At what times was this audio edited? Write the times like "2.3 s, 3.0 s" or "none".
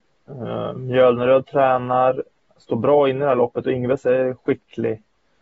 none